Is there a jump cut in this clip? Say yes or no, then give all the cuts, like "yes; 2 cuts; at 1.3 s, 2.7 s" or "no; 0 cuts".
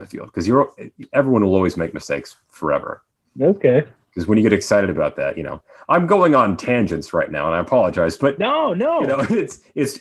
no; 0 cuts